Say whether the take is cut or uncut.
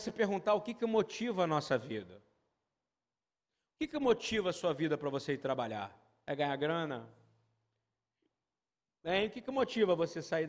uncut